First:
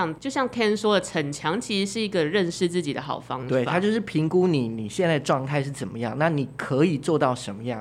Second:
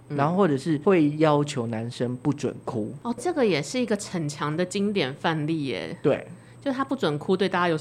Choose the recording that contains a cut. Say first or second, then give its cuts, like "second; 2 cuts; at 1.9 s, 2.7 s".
second; 1 cut; at 3.2 s